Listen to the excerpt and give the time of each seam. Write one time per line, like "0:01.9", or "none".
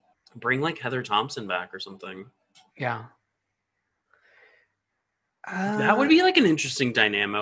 none